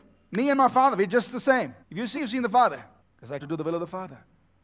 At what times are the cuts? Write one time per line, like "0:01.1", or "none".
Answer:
0:01.8
0:02.2
0:03.0
0:03.4